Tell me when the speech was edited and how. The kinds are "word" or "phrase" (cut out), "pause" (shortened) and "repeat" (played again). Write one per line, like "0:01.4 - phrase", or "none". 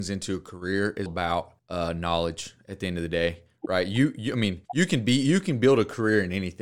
0:01.1 - word
0:01.6 - pause
0:04.7 - pause